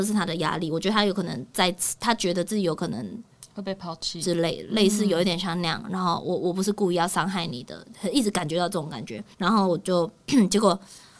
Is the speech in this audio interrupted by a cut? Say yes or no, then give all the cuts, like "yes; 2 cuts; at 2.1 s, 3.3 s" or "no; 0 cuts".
yes; 1 cut; at 9.3 s